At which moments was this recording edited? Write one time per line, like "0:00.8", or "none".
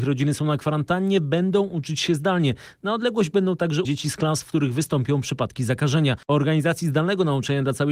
0:03.8
0:06.2

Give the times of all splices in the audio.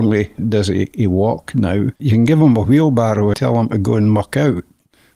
0:02.0
0:03.3

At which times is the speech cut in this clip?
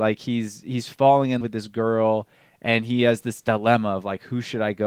0:01.4

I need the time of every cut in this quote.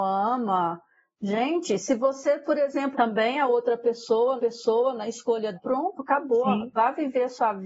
0:02.9
0:04.4
0:05.5

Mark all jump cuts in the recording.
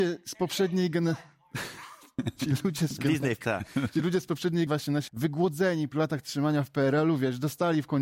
0:03.0
0:03.4
0:04.7
0:05.1
0:05.9

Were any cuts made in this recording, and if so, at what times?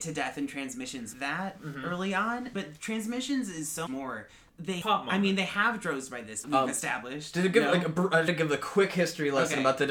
0:01.1
0:02.5
0:03.9
0:04.8
0:06.4
0:08.3

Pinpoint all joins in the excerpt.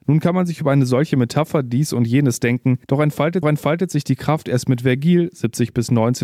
0:02.8
0:03.4

